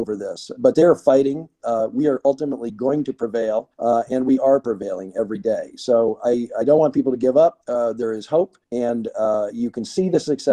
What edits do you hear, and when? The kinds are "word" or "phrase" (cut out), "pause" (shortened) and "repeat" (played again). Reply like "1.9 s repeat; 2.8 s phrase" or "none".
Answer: 3.7 s pause; 7.6 s pause; 8.6 s pause

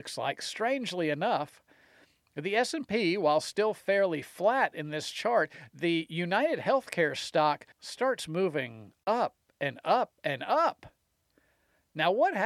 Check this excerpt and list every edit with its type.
7.7 s pause

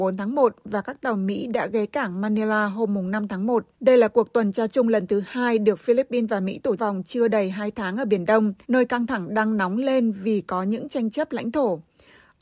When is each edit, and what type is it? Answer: 3.7 s pause; 6.8 s phrase; 8.6 s pause

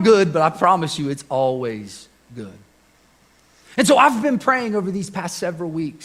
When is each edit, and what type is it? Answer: none

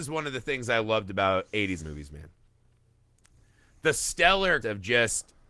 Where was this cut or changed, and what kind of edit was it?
1.8 s word; 4.6 s word

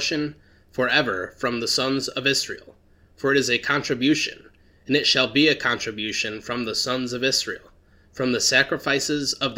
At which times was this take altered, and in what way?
none

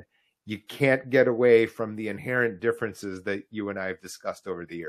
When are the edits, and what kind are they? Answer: none

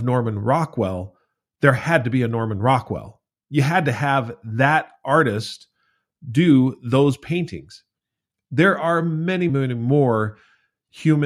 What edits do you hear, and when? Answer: 9.5 s word

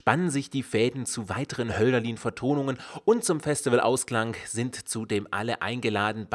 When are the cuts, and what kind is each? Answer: none

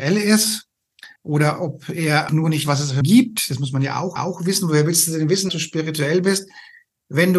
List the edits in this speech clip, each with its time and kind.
1.2 s pause; 2.3 s word; 2.6 s word; 3.0 s word; 4.2 s repeat; 5.5 s word

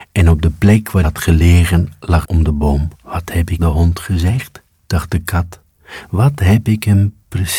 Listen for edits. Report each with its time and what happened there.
1.0 s word; 2.2 s phrase; 2.9 s pause; 3.6 s phrase

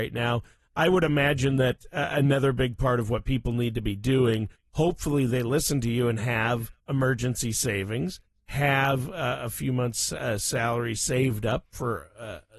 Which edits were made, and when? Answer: 6.8 s pause

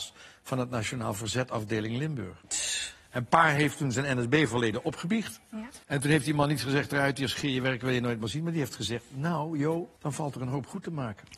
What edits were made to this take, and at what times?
5.8 s pause; 10.0 s pause

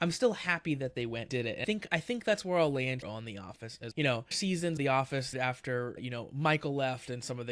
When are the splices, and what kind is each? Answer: 1.3 s word; 1.6 s word; 3.0 s word; 3.9 s word; 4.3 s word; 4.8 s word; 5.3 s word; 6.0 s word

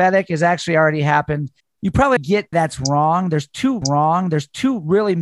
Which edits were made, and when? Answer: 1.6 s pause; 2.2 s word; 2.5 s word; 3.8 s repeat

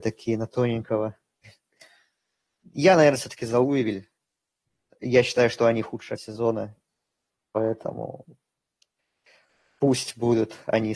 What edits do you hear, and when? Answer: 6.2 s word

